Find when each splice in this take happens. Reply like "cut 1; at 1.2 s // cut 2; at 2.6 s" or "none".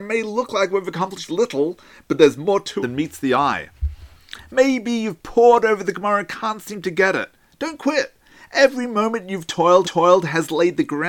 cut 1; at 1.3 s // cut 2; at 2.8 s // cut 3; at 9.8 s